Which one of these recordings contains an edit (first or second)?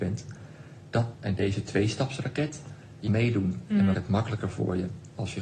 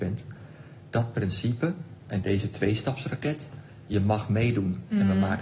first